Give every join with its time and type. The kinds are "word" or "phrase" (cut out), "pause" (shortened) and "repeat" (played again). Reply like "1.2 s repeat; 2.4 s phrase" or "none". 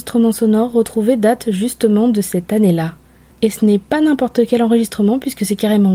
none

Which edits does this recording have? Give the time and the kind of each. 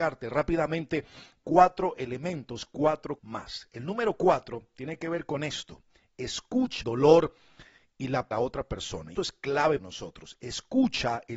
3.2 s word; 6.8 s word; 8.3 s phrase; 9.1 s word; 9.8 s word

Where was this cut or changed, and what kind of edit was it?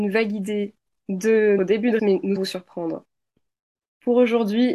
1.6 s word; 2.0 s word; 2.4 s word

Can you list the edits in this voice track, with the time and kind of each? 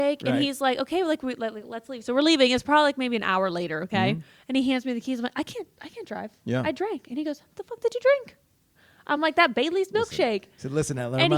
none

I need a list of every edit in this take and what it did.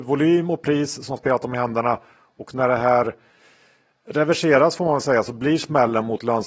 none

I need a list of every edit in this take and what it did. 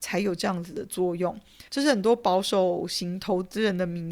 1.7 s pause

